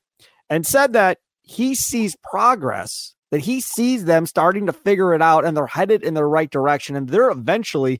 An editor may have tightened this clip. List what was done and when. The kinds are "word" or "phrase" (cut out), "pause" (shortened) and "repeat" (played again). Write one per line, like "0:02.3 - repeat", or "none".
none